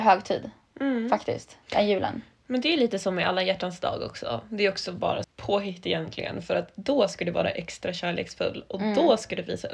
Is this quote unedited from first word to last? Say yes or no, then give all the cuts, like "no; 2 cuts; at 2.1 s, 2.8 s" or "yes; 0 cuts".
no; 2 cuts; at 1.6 s, 5.2 s